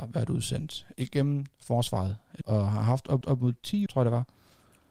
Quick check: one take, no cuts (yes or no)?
no